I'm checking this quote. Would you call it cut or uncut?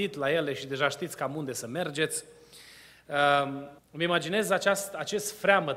cut